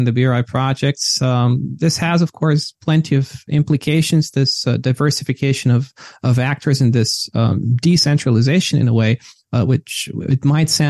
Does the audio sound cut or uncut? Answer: uncut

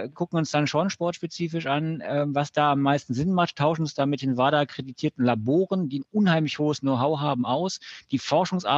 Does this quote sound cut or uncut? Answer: uncut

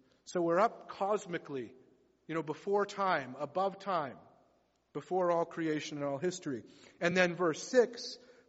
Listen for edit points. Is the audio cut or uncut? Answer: uncut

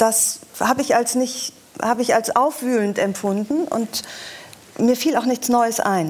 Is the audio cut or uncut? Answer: uncut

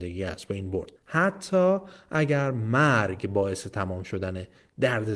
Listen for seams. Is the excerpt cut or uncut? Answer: cut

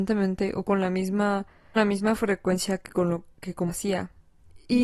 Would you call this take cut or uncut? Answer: cut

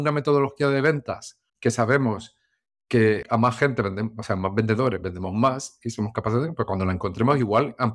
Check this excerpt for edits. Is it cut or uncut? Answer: cut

